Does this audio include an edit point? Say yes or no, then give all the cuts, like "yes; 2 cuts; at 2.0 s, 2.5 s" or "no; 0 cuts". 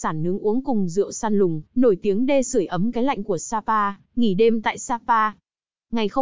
yes; 2 cuts; at 1.7 s, 4.0 s